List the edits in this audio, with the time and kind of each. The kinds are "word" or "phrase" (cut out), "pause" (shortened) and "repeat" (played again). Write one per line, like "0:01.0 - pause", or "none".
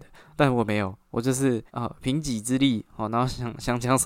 0:01.7 - pause